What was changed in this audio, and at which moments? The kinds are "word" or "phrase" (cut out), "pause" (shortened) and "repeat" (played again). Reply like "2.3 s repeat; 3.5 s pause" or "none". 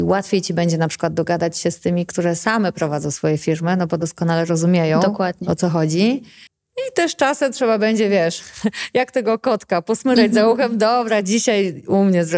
6.5 s pause